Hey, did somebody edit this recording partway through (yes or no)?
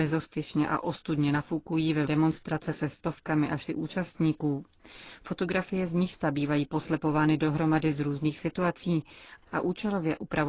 yes